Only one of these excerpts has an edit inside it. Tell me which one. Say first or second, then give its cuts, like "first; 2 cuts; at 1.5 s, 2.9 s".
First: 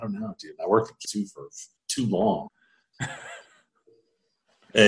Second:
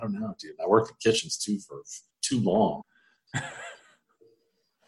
first; 1 cut; at 1.0 s